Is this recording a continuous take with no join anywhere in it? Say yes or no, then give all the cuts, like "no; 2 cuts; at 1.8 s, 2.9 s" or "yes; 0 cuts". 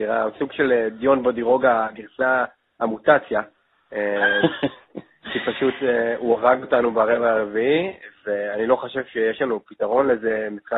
yes; 0 cuts